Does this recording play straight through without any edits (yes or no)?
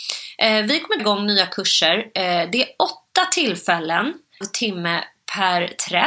no